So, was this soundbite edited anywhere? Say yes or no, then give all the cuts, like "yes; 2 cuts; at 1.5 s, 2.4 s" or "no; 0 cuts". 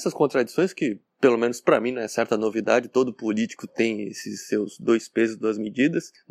no; 0 cuts